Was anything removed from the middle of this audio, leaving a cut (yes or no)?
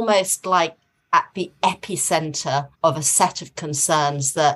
yes